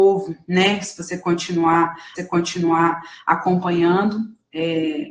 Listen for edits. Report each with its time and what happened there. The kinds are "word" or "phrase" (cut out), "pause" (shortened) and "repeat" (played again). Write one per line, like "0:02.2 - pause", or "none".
0:02.2 - repeat